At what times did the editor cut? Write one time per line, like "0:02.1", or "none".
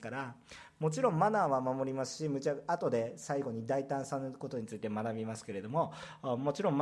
none